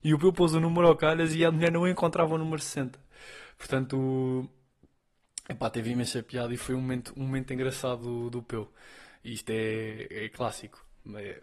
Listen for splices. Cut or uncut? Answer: uncut